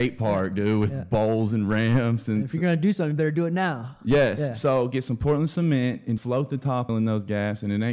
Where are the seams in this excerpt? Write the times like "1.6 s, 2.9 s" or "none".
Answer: 6.2 s, 6.9 s